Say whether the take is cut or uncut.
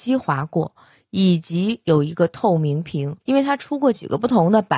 cut